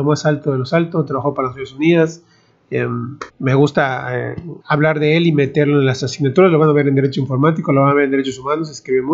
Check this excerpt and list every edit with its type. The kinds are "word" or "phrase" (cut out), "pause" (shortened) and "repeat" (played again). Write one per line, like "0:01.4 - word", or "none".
0:03.3 - pause
0:04.6 - pause